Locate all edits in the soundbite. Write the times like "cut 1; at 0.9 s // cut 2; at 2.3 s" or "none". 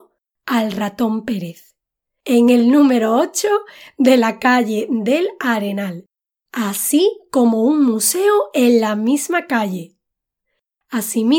none